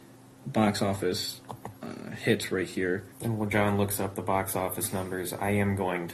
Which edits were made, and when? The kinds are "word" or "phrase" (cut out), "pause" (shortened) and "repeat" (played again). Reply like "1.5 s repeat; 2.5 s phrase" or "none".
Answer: 3.1 s pause

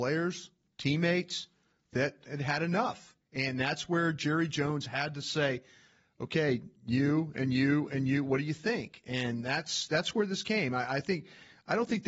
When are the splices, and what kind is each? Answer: 3.2 s pause; 6.8 s pause

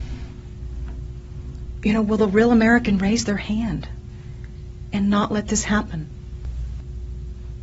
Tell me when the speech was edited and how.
none

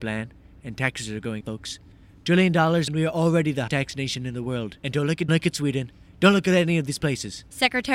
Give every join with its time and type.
1.4 s word; 2.9 s phrase; 3.7 s word; 4.8 s pause; 5.3 s phrase

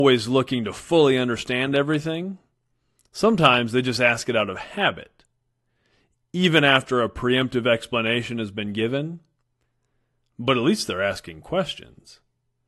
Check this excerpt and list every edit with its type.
none

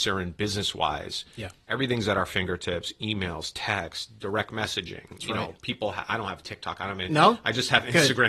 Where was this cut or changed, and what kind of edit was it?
none

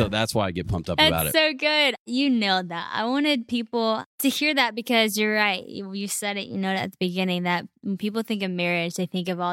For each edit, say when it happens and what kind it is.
none

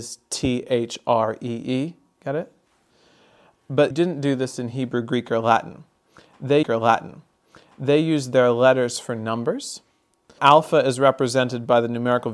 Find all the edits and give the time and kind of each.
3.9 s word; 6.6 s repeat; 10.4 s word

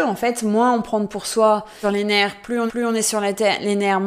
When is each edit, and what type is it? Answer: 1.1 s word; 1.8 s phrase; 2.7 s repeat

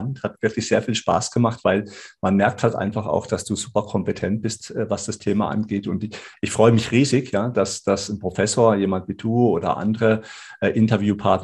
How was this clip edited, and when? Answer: none

